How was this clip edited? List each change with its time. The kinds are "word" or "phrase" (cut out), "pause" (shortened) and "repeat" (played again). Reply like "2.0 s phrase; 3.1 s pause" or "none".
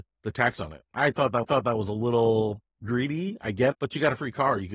1.4 s repeat; 3.7 s word

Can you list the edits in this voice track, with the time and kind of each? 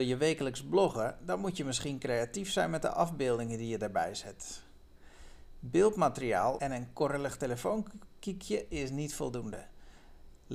6.6 s phrase

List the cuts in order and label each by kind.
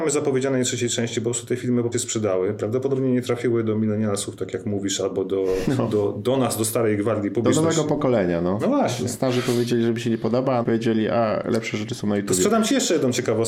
1.9 s phrase; 10.6 s phrase

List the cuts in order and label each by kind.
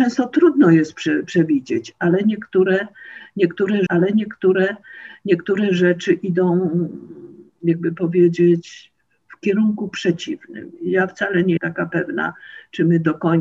3.9 s repeat; 11.6 s word

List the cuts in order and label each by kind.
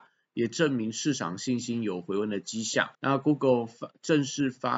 2.9 s pause

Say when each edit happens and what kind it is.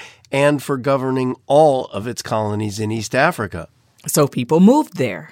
none

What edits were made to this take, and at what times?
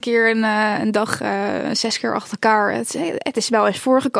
none

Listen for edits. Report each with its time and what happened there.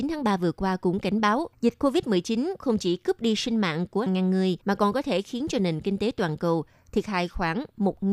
1.5 s pause; 4.1 s word; 4.6 s pause

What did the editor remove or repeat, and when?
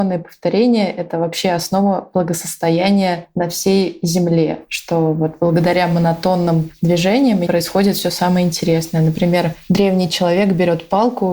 7.5 s word

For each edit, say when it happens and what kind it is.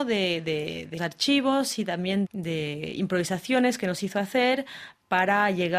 1.0 s word; 2.2 s word

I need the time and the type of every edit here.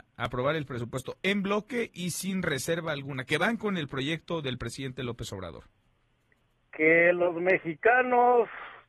none

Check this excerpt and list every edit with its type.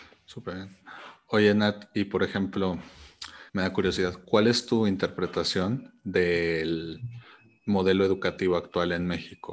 3.5 s pause

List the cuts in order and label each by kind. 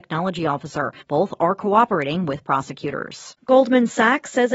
1.0 s pause; 3.4 s pause

